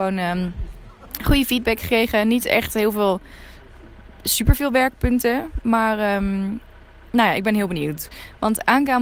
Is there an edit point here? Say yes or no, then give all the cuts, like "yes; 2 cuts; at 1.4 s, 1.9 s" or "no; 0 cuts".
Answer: no; 0 cuts